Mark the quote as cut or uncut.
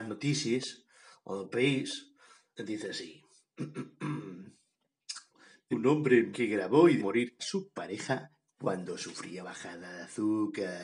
cut